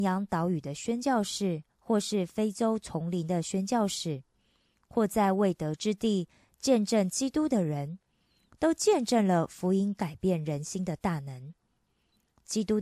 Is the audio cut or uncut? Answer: cut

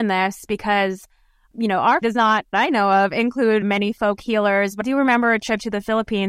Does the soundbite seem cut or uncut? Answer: cut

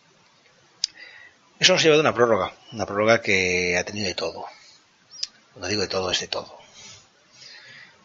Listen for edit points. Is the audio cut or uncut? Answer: uncut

